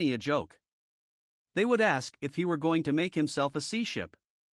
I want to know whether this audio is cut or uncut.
uncut